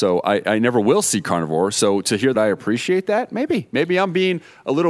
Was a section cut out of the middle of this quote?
yes; 1 cut; at 2.3 s

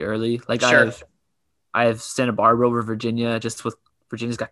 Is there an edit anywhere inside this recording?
no; 0 cuts

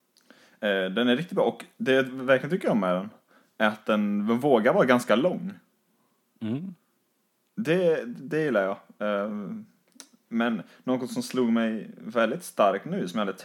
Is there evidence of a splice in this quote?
no; 0 cuts

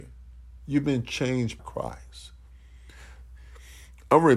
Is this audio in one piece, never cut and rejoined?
no; 1 cut; at 1.6 s

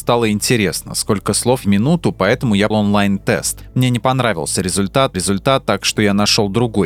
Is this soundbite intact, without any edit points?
no; 3 cuts; at 1.6 s, 2.7 s, 5.1 s

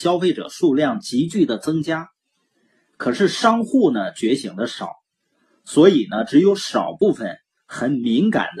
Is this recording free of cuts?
yes; 0 cuts

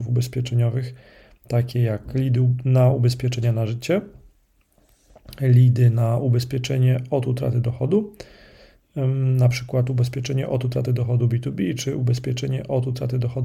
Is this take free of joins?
yes; 0 cuts

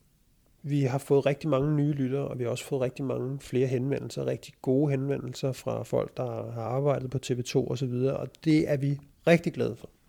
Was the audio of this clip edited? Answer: no; 0 cuts

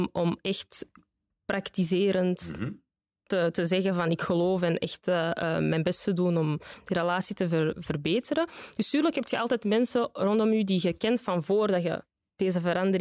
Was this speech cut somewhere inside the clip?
no; 0 cuts

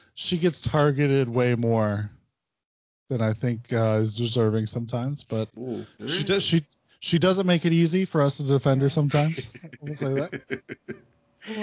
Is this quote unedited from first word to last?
yes; 0 cuts

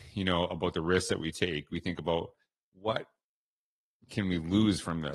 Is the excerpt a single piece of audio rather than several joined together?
yes; 0 cuts

